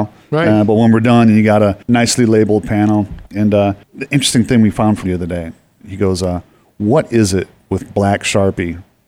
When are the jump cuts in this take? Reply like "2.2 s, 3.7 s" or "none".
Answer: 1.8 s, 3.3 s, 3.8 s, 5.1 s